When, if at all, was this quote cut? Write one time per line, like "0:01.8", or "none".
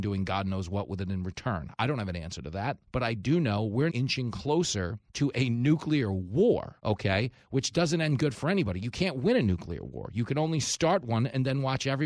0:02.9
0:03.9
0:05.1
0:06.8